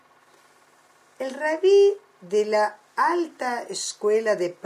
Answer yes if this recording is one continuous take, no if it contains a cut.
yes